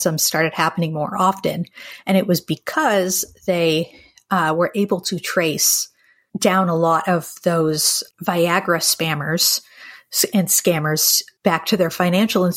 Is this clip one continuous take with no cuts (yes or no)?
no